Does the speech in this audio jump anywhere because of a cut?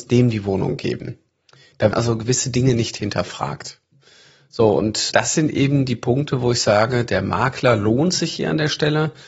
yes; 2 cuts; at 1.9 s, 5.1 s

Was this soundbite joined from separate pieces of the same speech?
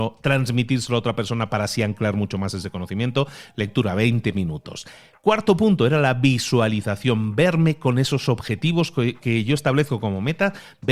no; 0 cuts

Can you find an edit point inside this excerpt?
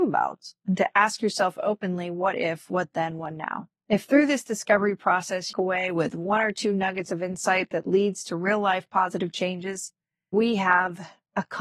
yes; 3 cuts; at 3.8 s, 5.5 s, 10.3 s

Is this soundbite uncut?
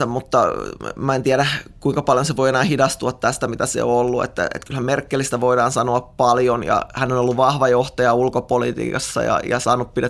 yes; 0 cuts

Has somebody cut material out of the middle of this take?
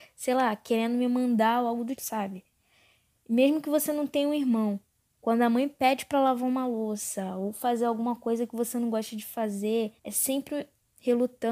yes; 2 cuts; at 2.0 s, 10.0 s

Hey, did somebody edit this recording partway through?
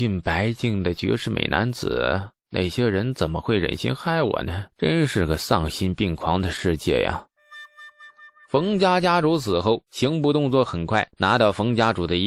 yes; 2 cuts; at 4.7 s, 11.1 s

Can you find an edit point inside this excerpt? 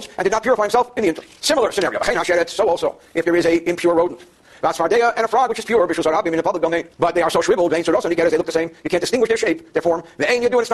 yes; 2 cuts; at 1.4 s, 6.9 s

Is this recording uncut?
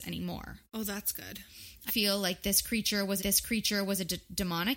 no; 2 cuts; at 1.9 s, 3.2 s

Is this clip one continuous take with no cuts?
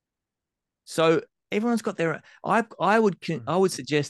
yes; 0 cuts

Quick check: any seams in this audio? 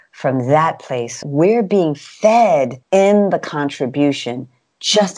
yes; 2 cuts; at 1.2 s, 2.8 s

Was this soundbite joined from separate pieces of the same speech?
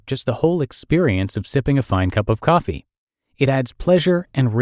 no; 0 cuts

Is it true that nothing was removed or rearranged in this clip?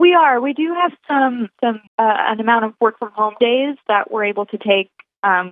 no; 2 cuts; at 1.5 s, 1.9 s

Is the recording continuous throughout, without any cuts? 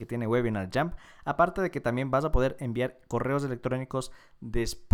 yes; 0 cuts

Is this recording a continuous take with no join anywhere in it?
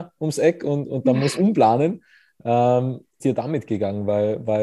no; 2 cuts; at 1.4 s, 3.2 s

